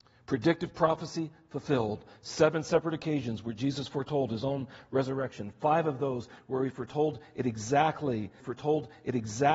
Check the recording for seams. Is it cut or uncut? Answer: cut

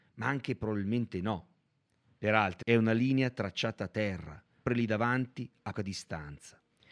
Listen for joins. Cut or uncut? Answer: cut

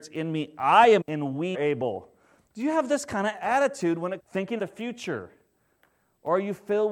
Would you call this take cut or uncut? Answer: cut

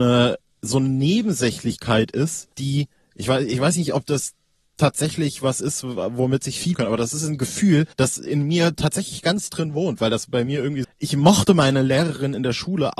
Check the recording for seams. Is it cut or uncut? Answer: cut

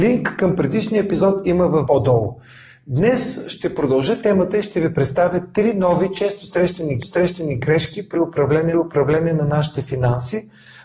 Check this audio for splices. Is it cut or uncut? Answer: cut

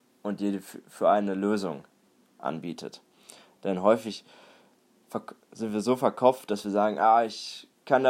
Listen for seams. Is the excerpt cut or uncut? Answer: uncut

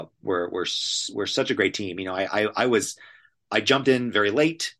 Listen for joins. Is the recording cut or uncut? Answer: uncut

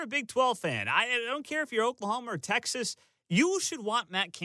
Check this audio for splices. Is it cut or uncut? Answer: uncut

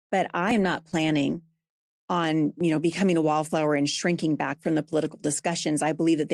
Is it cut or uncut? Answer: uncut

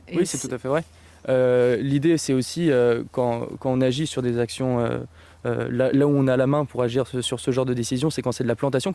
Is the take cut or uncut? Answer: uncut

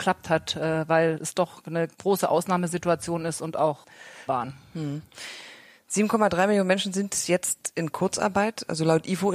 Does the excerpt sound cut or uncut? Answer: cut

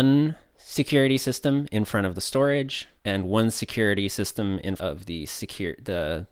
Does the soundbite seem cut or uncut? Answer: cut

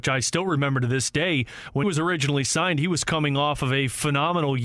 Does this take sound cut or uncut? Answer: cut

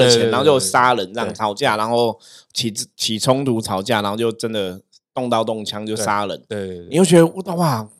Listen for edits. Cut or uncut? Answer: uncut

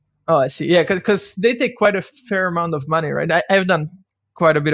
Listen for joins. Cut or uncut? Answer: uncut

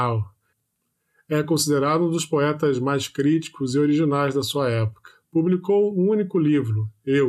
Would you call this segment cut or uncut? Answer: uncut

